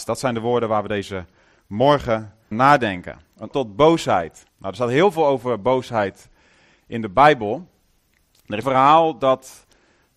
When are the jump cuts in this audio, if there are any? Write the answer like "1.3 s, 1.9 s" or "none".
2.5 s, 3.5 s, 4.5 s, 8.6 s